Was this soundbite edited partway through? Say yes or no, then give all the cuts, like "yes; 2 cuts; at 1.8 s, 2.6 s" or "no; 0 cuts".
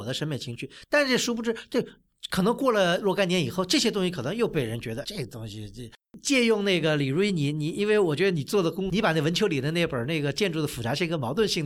yes; 2 cuts; at 5.0 s, 8.9 s